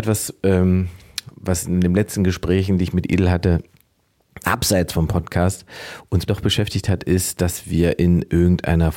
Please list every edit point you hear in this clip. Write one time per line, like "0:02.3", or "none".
0:06.3